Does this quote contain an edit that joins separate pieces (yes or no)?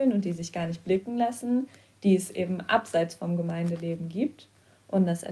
no